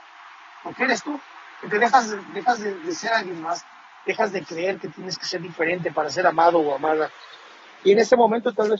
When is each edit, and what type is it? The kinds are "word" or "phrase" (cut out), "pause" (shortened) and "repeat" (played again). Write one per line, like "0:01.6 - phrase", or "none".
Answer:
none